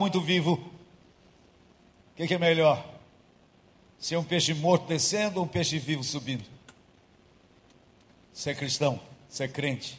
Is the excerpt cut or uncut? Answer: uncut